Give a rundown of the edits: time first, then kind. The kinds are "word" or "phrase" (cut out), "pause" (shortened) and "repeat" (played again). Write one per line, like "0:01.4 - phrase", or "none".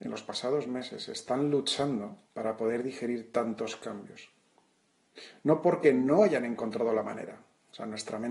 0:02.3 - pause